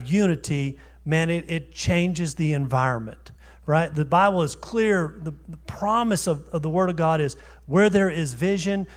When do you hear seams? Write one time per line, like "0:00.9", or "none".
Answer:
none